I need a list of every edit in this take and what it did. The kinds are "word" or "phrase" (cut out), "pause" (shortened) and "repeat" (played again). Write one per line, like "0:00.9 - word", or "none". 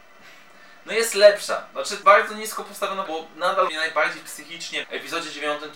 0:02.0 - word
0:03.1 - word
0:03.7 - phrase
0:04.8 - word